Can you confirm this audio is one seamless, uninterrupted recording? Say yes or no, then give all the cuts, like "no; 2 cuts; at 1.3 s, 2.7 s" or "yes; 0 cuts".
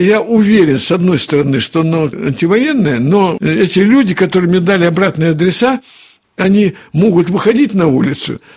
yes; 0 cuts